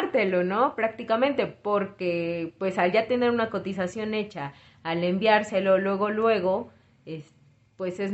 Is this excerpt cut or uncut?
uncut